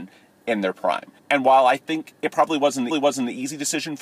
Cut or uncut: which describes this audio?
cut